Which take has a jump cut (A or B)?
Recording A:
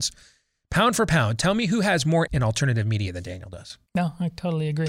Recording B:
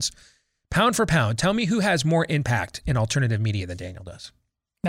A